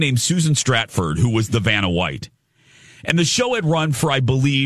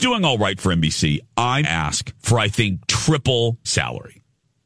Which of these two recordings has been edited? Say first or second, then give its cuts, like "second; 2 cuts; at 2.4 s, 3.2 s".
second; 3 cuts; at 1.6 s, 2.2 s, 3.6 s